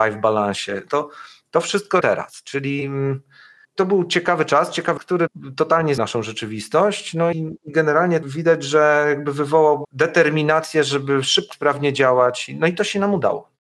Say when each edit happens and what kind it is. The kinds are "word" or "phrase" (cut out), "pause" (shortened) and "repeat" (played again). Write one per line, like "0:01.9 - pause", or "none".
0:02.0 - word
0:03.6 - word
0:05.0 - word
0:06.0 - word
0:07.3 - word
0:08.2 - word
0:09.8 - word
0:11.5 - word